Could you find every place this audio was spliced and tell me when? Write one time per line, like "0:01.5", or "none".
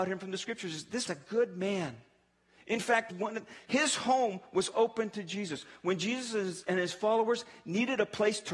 0:01.1
0:03.1
0:04.7